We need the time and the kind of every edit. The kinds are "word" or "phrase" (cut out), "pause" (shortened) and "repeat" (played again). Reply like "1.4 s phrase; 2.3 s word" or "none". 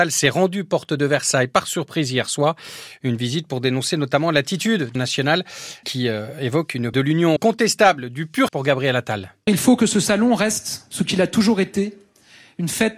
4.9 s word; 5.8 s word; 6.9 s phrase; 7.4 s word; 8.5 s word